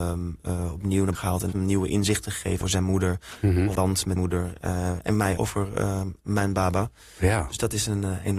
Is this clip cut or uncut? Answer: cut